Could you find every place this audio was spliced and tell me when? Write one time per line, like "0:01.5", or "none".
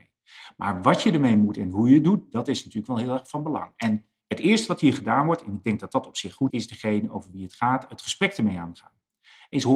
0:06.5

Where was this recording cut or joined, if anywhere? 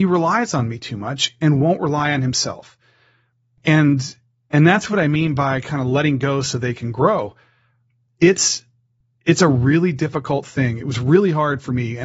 none

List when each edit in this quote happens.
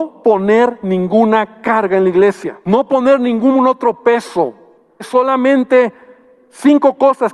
0:02.6
0:05.0

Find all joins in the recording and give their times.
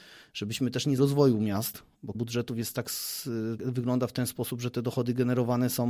0:01.0
0:02.1
0:03.6

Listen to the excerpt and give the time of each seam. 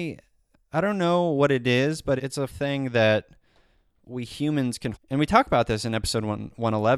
0:02.2
0:02.5
0:04.0
0:04.9

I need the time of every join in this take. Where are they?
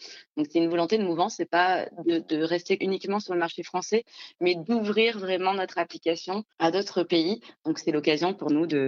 0:02.8
0:06.5

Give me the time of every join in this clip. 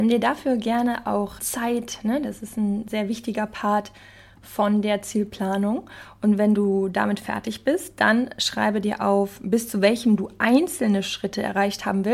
0:01.4
0:10.2

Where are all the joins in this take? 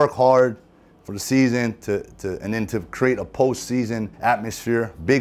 0:04.1

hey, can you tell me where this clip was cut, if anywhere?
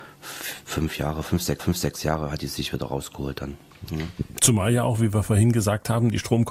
0:01.6

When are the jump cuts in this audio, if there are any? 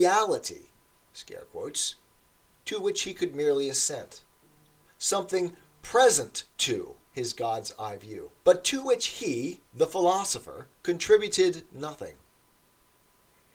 0:07.0
0:08.4
0:09.7
0:10.7

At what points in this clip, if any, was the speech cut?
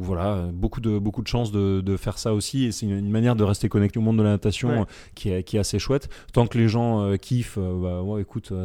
0:03.9

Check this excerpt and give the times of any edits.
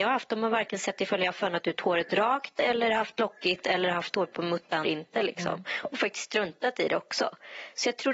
0:04.8

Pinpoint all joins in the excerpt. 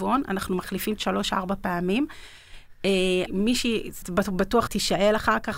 0:01.0
0:03.3
0:04.0
0:04.7

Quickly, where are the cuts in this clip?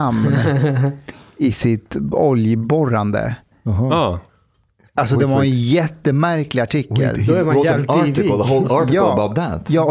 none

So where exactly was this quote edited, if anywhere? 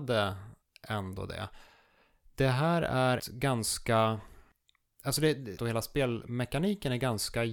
0:03.2
0:05.6

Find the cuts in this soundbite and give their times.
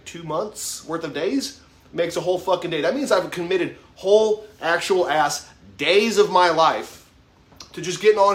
none

